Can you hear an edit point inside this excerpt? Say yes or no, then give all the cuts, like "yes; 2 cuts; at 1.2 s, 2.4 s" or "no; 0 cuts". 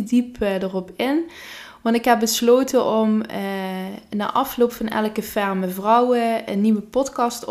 no; 0 cuts